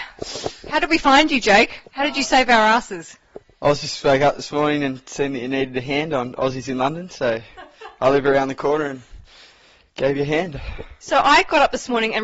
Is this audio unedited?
yes; 0 cuts

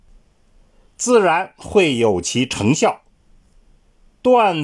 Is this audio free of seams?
yes; 0 cuts

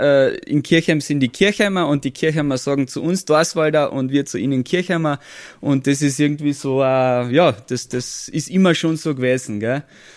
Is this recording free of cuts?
yes; 0 cuts

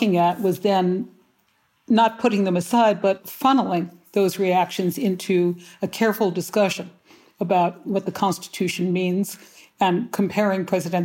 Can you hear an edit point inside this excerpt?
no; 0 cuts

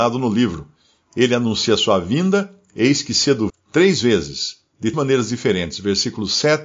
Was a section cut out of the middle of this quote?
yes; 2 cuts; at 3.5 s, 4.9 s

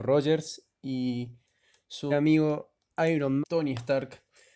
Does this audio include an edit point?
yes; 2 cuts; at 2.1 s, 3.4 s

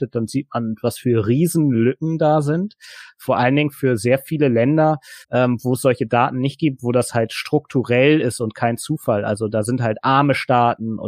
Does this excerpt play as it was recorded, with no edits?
no; 1 cut; at 5.2 s

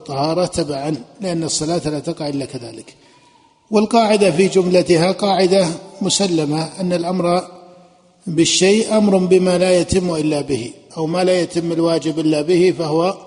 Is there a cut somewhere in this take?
no; 0 cuts

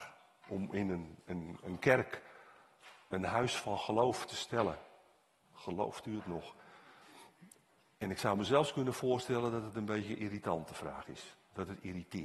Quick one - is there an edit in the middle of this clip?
no; 0 cuts

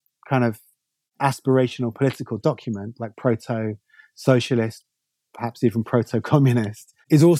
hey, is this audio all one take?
yes; 0 cuts

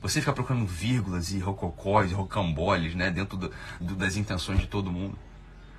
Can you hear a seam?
yes; 1 cut; at 3.8 s

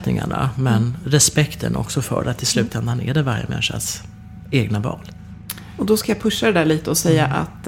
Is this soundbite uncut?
yes; 0 cuts

